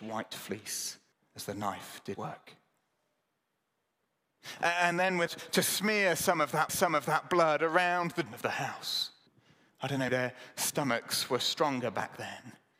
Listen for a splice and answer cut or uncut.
cut